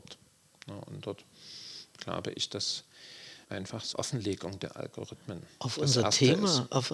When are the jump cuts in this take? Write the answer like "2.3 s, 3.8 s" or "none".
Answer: 3.4 s, 3.9 s